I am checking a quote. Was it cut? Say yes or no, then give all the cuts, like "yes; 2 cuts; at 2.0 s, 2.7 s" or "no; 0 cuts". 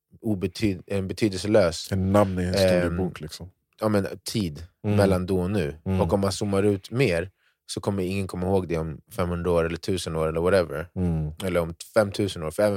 no; 0 cuts